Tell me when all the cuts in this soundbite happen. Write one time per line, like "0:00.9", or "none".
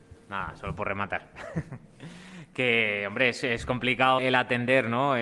0:04.2